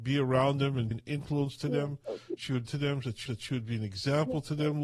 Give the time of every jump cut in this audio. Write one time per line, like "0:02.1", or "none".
0:00.9
0:02.7
0:03.3